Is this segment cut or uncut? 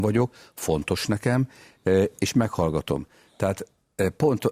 uncut